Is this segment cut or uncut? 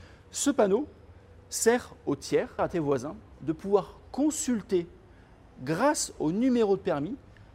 cut